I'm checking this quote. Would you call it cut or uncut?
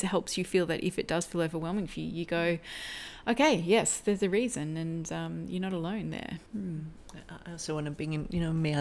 cut